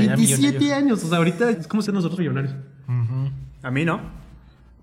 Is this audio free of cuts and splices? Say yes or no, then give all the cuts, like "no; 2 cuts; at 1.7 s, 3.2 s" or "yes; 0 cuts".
no; 3 cuts; at 1.5 s, 1.9 s, 2.2 s